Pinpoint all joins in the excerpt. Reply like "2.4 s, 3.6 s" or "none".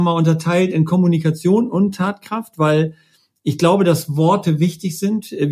none